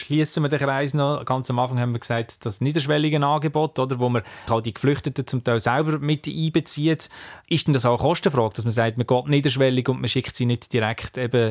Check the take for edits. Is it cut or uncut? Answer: cut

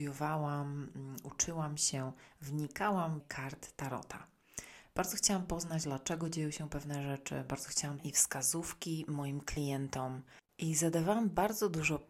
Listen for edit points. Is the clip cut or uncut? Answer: cut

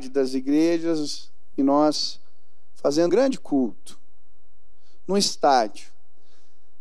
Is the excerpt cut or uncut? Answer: cut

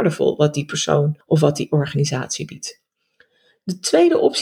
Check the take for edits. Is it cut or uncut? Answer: uncut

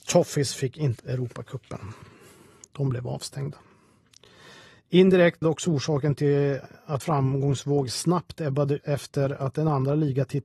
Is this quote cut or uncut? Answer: cut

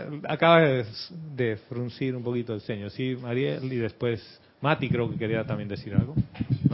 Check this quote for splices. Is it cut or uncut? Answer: uncut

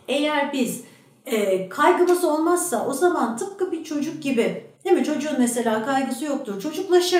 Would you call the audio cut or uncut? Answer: cut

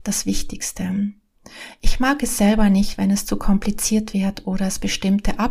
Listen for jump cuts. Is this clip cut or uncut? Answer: uncut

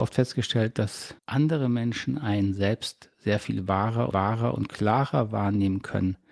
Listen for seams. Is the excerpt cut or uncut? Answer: cut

